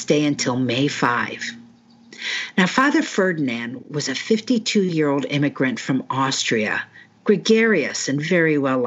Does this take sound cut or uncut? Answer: uncut